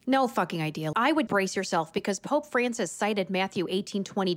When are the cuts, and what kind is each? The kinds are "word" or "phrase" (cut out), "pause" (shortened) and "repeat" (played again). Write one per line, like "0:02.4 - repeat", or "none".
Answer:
0:00.9 - phrase
0:01.3 - word